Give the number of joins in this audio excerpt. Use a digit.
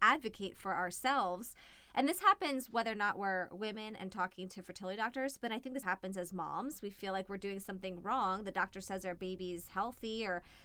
1